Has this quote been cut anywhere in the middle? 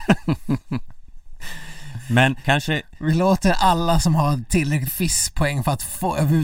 yes; 2 cuts; at 2.4 s, 4.9 s

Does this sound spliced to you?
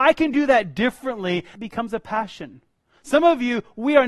no; 0 cuts

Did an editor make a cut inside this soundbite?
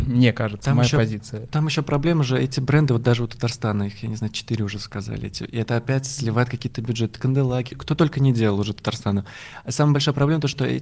yes; 1 cut; at 7.7 s

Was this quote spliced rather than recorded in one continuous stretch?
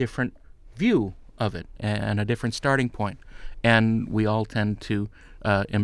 yes; 1 cut; at 1.8 s

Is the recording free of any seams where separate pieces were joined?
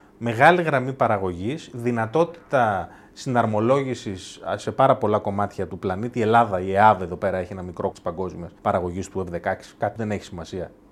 no; 4 cuts; at 5.7 s, 7.9 s, 8.6 s, 10.0 s

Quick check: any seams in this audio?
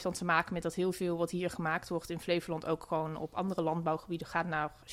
no; 0 cuts

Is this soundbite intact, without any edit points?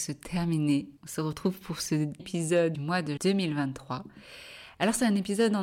no; 4 cuts; at 1.0 s, 2.2 s, 2.7 s, 3.2 s

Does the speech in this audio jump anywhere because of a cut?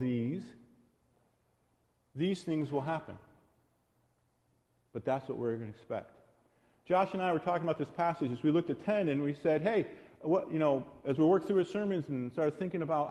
no; 0 cuts

